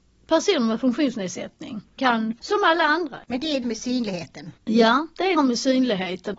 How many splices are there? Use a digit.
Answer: 6